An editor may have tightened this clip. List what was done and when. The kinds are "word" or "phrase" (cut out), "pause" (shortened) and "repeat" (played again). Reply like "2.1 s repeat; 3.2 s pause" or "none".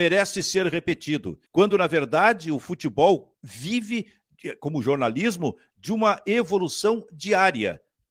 1.5 s pause; 3.3 s pause